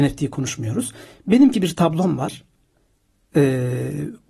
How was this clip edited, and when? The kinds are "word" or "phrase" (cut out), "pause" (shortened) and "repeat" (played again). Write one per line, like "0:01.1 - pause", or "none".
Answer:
0:01.5 - word